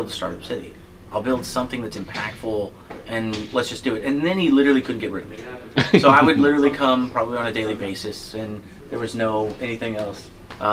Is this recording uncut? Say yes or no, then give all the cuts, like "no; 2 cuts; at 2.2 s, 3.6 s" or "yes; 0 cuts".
yes; 0 cuts